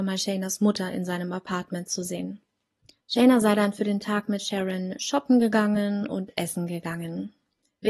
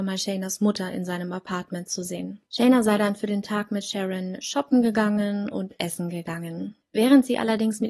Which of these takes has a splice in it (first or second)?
second